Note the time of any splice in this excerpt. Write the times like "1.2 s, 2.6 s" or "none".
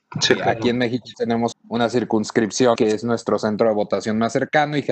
1.1 s, 1.5 s, 2.7 s